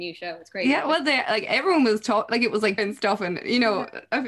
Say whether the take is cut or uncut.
cut